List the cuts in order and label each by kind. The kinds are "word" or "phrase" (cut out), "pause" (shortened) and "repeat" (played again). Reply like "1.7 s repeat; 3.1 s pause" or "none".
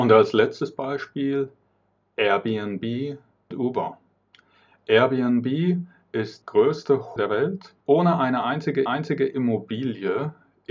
3.5 s word; 6.4 s word; 7.2 s word; 7.8 s pause; 8.9 s repeat